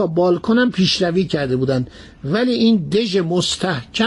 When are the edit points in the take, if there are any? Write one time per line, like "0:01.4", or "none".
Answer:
none